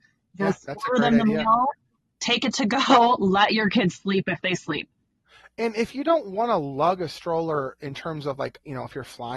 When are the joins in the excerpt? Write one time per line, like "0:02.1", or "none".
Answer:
none